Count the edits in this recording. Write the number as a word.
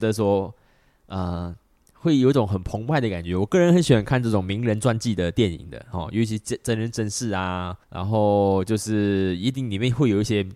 one